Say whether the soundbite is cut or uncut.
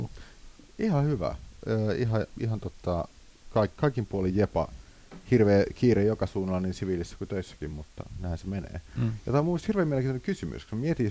uncut